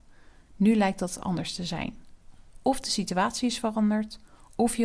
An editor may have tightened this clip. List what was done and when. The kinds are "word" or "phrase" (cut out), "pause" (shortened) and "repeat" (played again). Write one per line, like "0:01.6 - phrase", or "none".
none